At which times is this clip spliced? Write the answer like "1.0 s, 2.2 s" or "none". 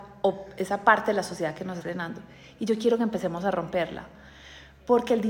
1.8 s